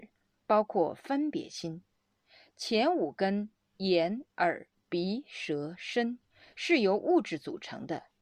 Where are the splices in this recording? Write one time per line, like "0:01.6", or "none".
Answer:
none